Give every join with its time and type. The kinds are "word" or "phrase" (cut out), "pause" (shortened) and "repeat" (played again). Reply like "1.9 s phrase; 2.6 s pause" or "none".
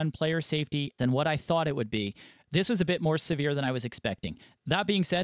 1.0 s word